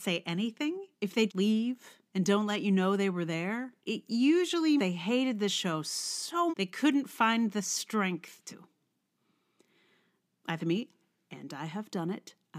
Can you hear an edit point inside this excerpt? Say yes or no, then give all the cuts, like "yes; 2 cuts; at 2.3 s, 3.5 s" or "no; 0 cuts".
yes; 8 cuts; at 0.9 s, 1.3 s, 2.1 s, 3.8 s, 4.8 s, 6.5 s, 8.5 s, 10.6 s